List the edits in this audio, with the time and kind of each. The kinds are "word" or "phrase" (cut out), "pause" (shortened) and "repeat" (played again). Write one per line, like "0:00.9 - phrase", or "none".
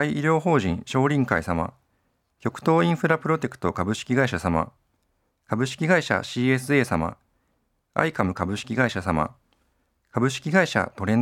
none